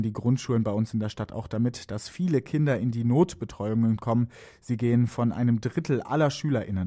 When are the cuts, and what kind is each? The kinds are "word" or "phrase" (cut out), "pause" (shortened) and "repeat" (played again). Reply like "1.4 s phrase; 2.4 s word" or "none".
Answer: none